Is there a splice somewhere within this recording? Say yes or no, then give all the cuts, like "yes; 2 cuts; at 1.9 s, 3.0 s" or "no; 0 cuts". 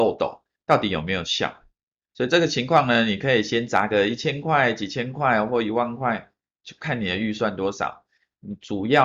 no; 0 cuts